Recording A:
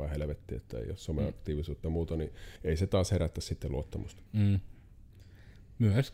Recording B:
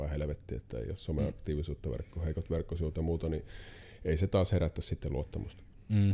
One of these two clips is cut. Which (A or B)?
A